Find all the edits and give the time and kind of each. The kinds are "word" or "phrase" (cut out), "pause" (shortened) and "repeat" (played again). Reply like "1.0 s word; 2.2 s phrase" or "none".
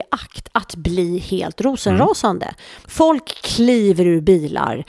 2.8 s pause